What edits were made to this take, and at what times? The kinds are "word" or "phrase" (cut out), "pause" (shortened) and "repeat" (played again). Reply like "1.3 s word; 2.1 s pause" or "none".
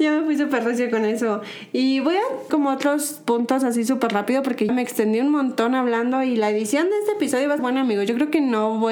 2.5 s word; 4.7 s word; 7.6 s word